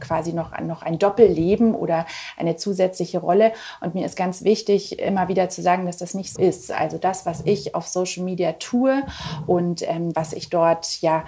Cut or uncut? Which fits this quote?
cut